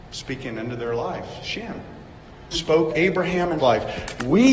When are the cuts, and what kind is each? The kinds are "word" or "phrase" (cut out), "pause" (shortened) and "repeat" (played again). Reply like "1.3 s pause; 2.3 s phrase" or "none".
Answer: 2.5 s word; 2.9 s word; 3.6 s word